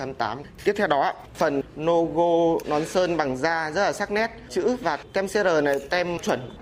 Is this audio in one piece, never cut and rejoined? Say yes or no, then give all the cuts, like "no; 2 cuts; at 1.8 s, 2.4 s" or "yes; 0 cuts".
yes; 0 cuts